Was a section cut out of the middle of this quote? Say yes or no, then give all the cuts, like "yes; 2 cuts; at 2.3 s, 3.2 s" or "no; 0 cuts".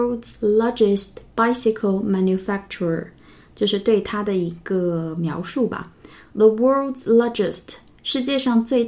no; 0 cuts